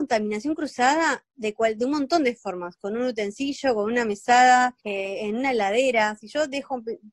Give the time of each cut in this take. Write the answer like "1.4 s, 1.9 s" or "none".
4.8 s